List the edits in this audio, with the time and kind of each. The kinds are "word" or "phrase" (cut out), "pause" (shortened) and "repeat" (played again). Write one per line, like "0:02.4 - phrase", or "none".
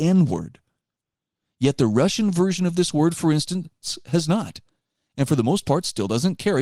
none